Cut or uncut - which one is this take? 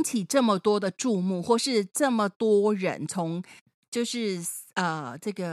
uncut